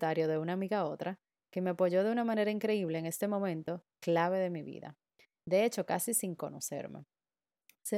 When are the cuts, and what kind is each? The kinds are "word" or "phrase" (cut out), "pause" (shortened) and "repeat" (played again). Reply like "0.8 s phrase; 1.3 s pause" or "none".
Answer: none